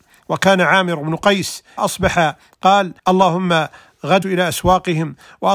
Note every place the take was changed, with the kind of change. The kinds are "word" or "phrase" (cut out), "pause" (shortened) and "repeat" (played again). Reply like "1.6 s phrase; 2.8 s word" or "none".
1.8 s word; 3.0 s pause; 4.2 s word